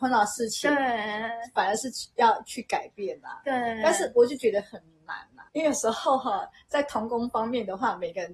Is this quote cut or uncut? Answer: cut